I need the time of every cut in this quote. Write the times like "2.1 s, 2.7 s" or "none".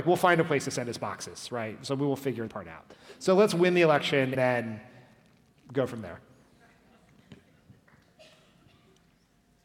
2.5 s, 4.3 s